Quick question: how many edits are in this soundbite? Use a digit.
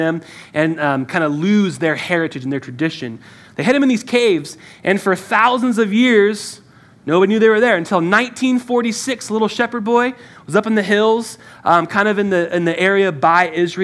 0